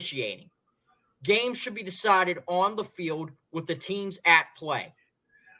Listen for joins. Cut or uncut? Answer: uncut